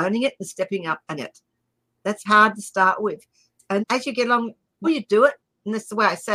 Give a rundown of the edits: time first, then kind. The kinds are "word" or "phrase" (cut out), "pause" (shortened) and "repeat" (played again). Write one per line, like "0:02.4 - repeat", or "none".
0:01.2 - word
0:02.3 - word
0:03.8 - word
0:04.8 - word